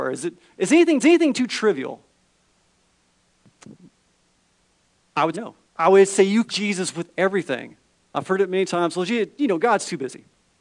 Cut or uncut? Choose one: cut